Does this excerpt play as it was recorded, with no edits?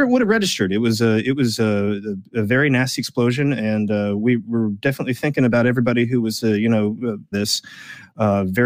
no; 1 cut; at 7.3 s

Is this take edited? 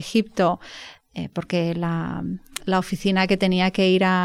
no; 0 cuts

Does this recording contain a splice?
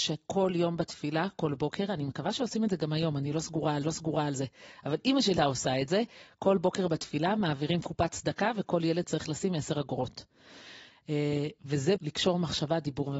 yes; 3 cuts; at 3.8 s, 5.4 s, 12.0 s

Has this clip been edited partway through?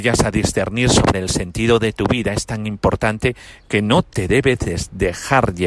no; 0 cuts

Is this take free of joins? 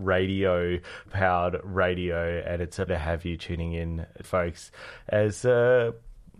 no; 3 cuts; at 1.1 s, 2.9 s, 4.2 s

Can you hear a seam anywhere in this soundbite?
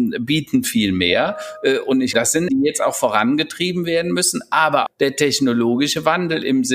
yes; 3 cuts; at 2.1 s, 2.5 s, 4.9 s

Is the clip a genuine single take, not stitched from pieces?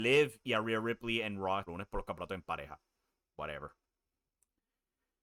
no; 1 cut; at 1.7 s

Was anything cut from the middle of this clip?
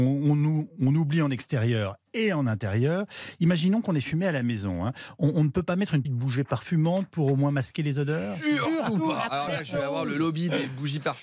yes; 2 cuts; at 6.0 s, 9.3 s

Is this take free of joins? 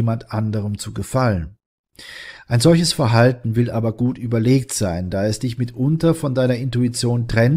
yes; 0 cuts

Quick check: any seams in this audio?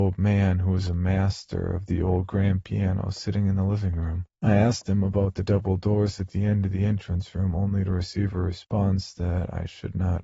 yes; 1 cut; at 4.3 s

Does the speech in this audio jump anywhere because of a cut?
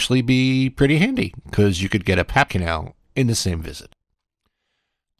yes; 1 cut; at 2.5 s

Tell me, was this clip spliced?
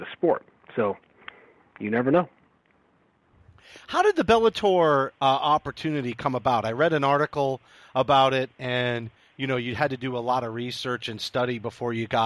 no; 0 cuts

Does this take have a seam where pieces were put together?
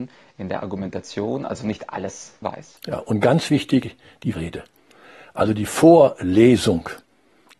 yes; 2 cuts; at 2.4 s, 4.3 s

